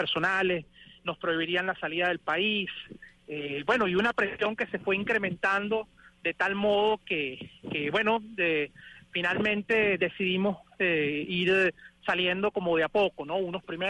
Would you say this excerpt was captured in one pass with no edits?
yes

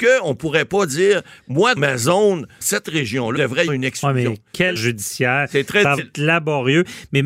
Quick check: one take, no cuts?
no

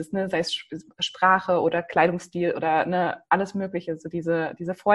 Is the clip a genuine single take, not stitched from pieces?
yes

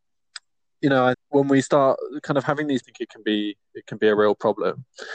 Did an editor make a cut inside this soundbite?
yes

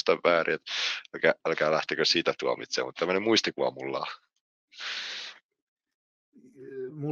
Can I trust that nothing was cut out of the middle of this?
yes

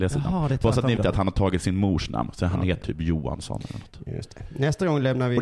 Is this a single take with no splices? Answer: no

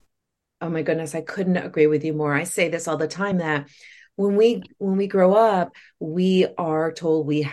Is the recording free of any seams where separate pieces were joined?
yes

